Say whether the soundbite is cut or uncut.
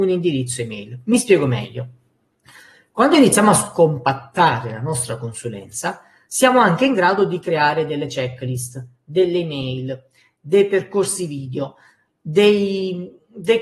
uncut